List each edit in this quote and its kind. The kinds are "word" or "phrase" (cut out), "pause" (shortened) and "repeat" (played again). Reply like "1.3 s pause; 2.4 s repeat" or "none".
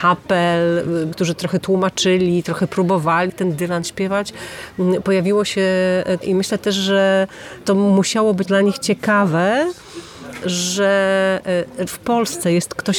1.1 s word; 3.3 s word; 6.2 s word; 8.4 s word; 11.9 s word